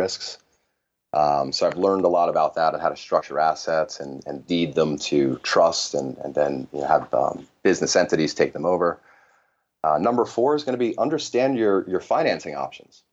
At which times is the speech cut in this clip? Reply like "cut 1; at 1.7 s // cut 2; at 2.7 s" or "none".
none